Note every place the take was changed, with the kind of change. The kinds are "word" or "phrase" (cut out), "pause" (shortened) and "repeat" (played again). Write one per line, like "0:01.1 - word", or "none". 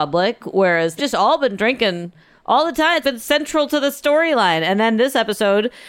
0:01.0 - word
0:03.0 - word